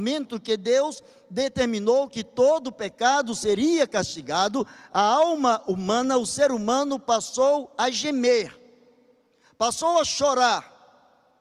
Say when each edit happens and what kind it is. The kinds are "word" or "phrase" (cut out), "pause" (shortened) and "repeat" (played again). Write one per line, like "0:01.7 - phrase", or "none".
none